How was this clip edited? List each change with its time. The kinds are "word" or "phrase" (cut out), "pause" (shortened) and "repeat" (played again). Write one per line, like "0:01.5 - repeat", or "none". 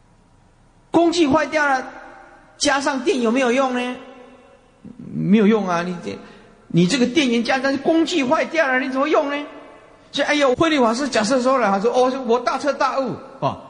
0:10.5 - word